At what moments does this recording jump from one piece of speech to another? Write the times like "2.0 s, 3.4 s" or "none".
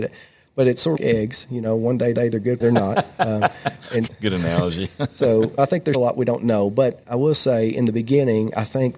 1.0 s, 2.1 s, 2.6 s, 4.1 s, 5.6 s, 5.9 s, 7.0 s